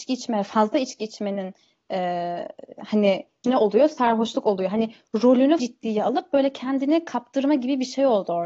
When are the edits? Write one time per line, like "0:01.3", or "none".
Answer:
0:03.4
0:05.6